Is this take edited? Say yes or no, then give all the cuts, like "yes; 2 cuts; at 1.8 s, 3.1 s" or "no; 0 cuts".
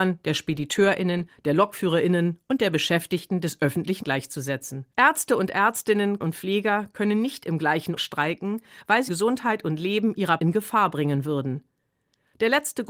yes; 6 cuts; at 4.0 s, 4.9 s, 6.2 s, 8.0 s, 9.1 s, 10.4 s